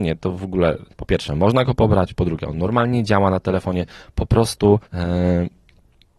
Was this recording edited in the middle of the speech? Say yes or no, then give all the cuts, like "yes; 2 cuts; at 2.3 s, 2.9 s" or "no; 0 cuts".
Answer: yes; 2 cuts; at 0.9 s, 4.9 s